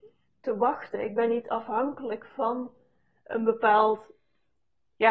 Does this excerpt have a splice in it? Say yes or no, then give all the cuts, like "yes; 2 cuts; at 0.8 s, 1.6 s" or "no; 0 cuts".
no; 0 cuts